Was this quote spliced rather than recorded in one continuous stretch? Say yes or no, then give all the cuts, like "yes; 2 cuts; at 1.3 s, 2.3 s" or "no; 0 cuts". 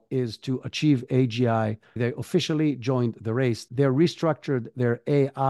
no; 0 cuts